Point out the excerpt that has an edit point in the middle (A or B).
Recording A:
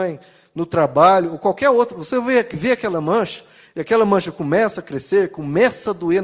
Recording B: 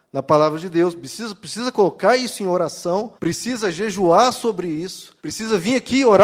B